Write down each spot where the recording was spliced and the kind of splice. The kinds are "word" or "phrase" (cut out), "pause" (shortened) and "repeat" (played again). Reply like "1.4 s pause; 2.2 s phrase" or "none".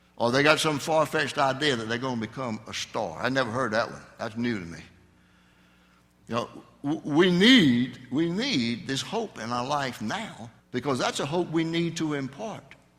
10.6 s pause